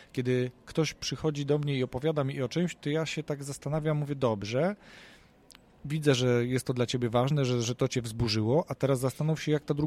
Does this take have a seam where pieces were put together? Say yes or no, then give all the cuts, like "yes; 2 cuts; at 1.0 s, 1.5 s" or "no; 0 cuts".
no; 0 cuts